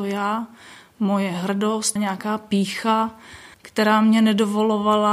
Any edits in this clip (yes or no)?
yes